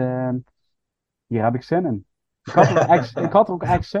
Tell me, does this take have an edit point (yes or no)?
no